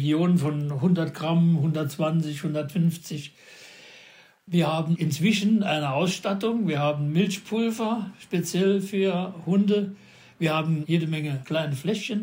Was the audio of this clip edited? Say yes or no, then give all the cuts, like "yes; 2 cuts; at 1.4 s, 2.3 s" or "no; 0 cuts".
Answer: no; 0 cuts